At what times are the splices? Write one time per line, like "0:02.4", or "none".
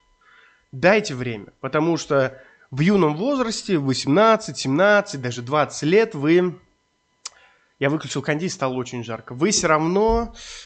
none